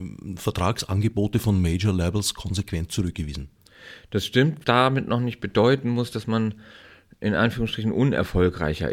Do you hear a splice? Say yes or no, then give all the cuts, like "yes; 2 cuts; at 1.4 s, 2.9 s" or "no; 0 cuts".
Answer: yes; 1 cut; at 4.6 s